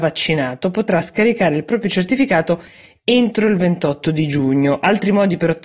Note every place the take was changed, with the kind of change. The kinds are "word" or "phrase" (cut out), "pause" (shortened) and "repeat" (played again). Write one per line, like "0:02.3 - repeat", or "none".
none